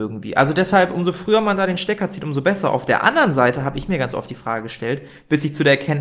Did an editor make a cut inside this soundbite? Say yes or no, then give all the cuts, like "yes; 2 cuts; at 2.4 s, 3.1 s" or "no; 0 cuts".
no; 0 cuts